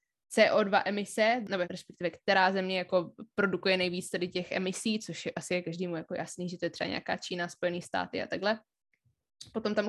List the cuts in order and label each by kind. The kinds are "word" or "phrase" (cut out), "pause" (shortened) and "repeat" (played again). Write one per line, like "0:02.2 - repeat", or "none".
0:01.6 - word